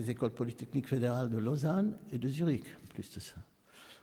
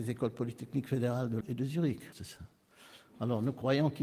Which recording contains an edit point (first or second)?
second